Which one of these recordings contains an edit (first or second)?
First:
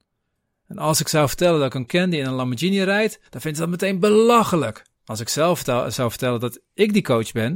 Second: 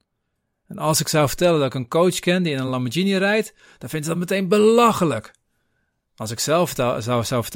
first